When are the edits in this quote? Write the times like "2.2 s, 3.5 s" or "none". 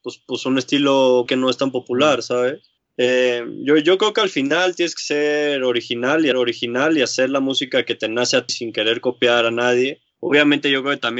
1.3 s, 2.8 s, 6.3 s, 8.5 s, 10.1 s